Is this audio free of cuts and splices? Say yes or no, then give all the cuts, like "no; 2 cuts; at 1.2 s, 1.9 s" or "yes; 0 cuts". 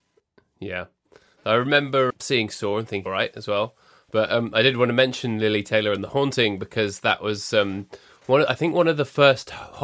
no; 2 cuts; at 2.1 s, 3.1 s